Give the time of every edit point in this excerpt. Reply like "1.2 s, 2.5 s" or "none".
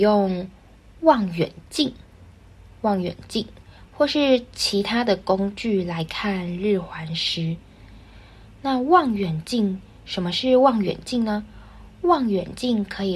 none